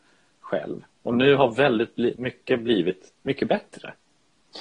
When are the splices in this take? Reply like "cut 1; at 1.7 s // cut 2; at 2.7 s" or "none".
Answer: cut 1; at 3.2 s